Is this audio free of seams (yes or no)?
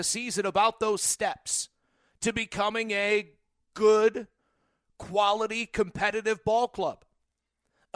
yes